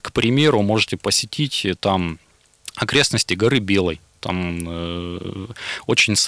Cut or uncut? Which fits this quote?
uncut